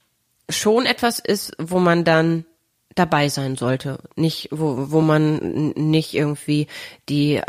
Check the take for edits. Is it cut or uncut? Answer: uncut